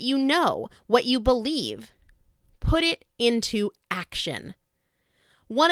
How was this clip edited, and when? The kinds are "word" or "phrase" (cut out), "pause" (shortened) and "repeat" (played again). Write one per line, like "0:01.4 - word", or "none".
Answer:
none